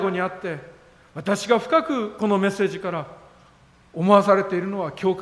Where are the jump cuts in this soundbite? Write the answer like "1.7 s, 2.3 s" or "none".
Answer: none